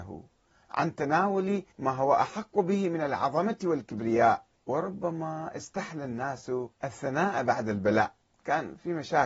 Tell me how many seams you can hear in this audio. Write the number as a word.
four